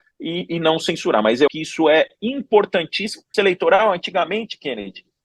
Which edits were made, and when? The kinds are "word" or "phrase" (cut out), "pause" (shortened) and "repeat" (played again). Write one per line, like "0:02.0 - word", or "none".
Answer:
0:01.5 - word
0:03.3 - phrase

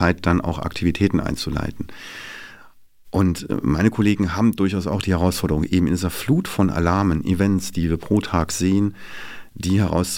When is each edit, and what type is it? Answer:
none

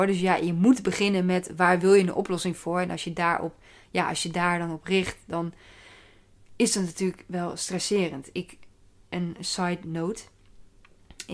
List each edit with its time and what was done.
none

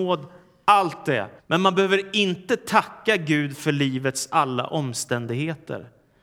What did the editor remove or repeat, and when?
0:01.4 - pause

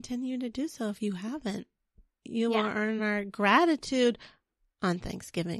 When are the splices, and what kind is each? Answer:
none

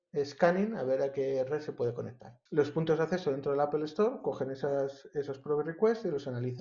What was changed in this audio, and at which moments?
0:02.5 - pause

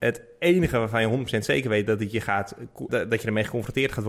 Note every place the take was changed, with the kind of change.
0:02.9 - word

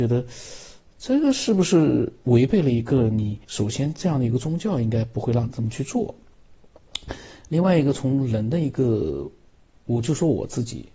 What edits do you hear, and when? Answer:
0:03.4 - pause

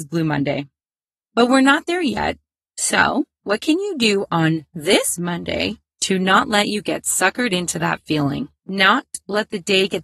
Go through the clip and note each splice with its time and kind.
none

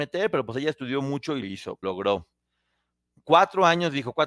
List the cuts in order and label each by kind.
0:01.4 - word
0:01.8 - word

